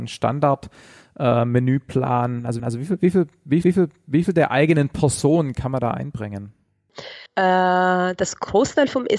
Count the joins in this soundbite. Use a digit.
3